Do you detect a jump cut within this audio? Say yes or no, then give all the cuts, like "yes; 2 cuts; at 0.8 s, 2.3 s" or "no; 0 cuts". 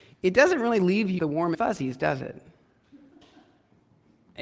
yes; 2 cuts; at 1.2 s, 1.5 s